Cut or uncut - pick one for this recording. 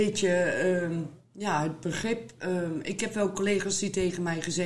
uncut